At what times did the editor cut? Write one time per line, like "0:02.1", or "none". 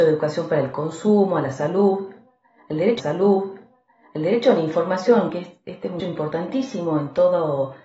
0:03.0
0:06.0

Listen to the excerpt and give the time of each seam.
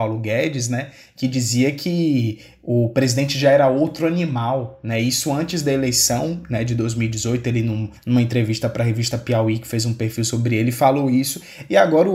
0:08.0

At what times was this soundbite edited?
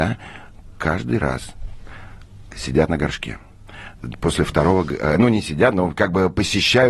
0:02.5

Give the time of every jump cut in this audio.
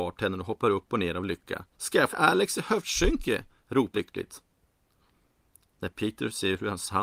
0:01.7
0:02.1
0:03.9

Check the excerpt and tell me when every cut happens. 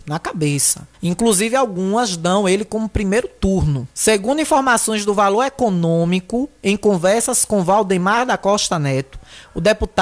0:00.9
0:03.9

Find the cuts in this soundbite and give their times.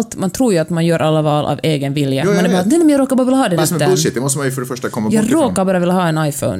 0:03.6

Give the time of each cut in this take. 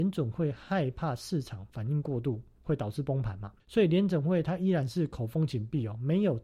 0:03.6

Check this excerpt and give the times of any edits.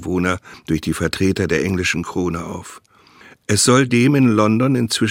none

